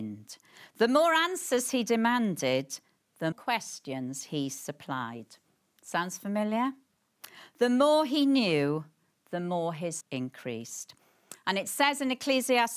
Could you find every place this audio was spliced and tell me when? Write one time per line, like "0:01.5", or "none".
0:03.3
0:10.0

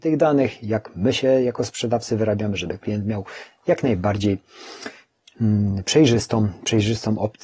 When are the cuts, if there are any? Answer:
none

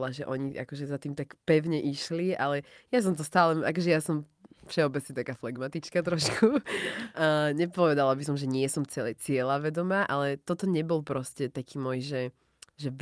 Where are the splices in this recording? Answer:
none

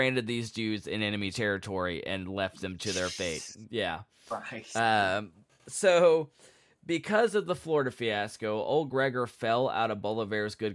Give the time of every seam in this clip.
none

